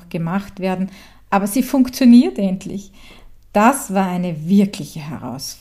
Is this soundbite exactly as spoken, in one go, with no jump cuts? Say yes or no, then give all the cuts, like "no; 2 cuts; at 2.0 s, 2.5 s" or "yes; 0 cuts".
yes; 0 cuts